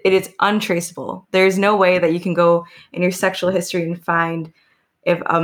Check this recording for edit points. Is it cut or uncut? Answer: uncut